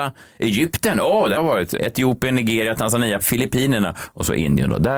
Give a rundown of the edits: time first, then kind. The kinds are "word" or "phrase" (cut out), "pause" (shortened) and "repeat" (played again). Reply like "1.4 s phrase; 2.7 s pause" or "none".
1.4 s word; 1.8 s word; 3.2 s word